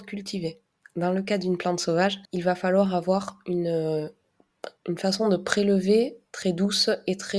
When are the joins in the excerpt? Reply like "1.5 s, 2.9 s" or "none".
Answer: 2.2 s, 4.8 s